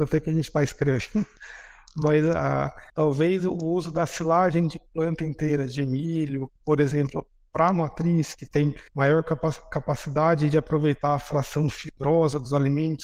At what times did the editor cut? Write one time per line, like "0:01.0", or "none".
0:02.9
0:06.6
0:08.9